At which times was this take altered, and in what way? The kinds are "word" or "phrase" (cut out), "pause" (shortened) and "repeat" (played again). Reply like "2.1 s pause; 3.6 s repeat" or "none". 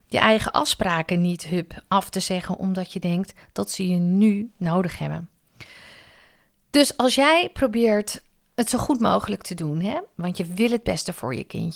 none